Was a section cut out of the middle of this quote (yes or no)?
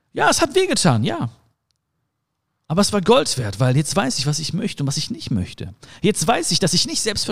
no